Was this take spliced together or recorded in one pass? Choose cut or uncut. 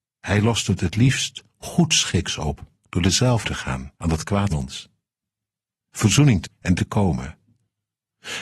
cut